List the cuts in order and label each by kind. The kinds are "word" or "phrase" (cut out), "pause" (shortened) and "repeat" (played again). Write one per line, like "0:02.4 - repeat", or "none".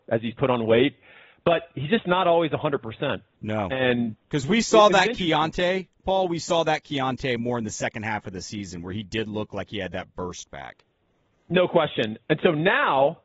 none